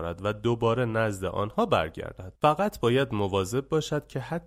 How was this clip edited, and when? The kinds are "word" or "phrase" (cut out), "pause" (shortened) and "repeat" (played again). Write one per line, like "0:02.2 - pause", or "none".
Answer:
0:02.4 - pause